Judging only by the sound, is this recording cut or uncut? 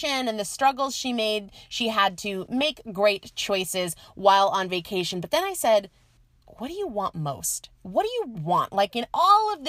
cut